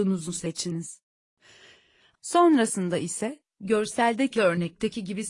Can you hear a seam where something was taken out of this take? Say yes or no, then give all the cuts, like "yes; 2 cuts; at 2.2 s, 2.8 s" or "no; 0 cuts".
no; 0 cuts